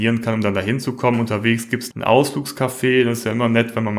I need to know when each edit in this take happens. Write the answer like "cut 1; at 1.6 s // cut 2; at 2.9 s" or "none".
cut 1; at 1.9 s